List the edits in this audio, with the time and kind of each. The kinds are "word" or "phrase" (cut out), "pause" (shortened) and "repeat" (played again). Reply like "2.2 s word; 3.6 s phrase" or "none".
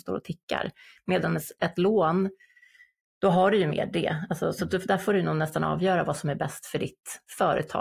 none